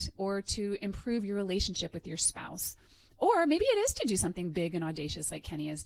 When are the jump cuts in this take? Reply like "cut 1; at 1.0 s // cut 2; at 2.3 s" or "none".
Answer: none